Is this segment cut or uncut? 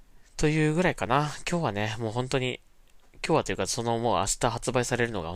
cut